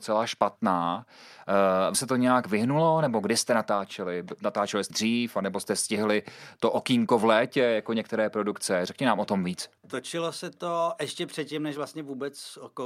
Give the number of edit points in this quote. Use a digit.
3